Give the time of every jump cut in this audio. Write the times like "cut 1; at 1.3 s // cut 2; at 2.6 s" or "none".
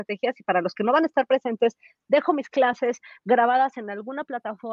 none